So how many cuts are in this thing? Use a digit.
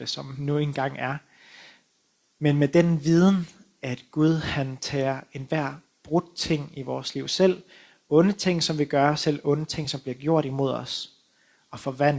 0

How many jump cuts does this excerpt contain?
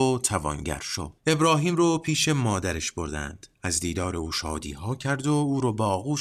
2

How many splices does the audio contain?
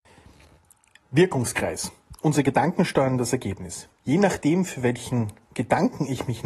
1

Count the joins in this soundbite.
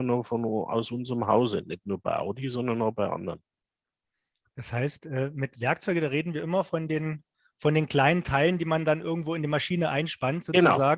0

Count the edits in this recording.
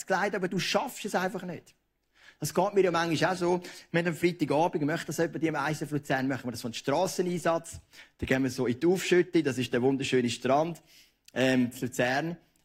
0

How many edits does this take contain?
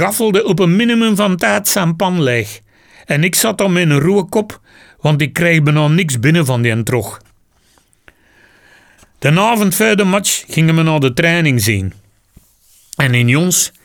0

